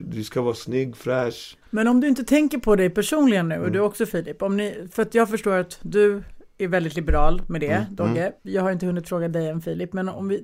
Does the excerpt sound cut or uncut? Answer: cut